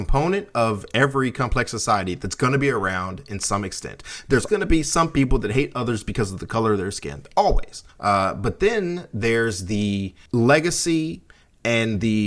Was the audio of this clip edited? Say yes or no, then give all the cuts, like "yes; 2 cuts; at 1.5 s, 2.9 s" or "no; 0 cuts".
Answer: yes; 3 cuts; at 4.5 s, 7.9 s, 10.3 s